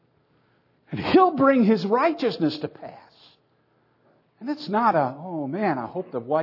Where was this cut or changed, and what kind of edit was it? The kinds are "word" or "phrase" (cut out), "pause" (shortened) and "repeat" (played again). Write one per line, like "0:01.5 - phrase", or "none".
none